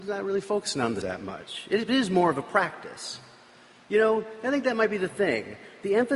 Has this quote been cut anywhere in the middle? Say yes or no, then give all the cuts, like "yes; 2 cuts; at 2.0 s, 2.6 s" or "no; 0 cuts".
yes; 1 cut; at 1.0 s